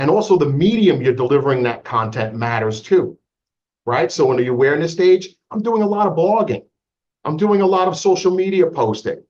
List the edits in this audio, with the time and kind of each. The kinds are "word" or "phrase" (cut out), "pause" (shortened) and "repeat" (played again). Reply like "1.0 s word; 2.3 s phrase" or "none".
none